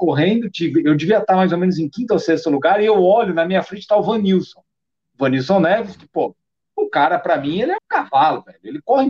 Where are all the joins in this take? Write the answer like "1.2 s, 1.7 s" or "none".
7.8 s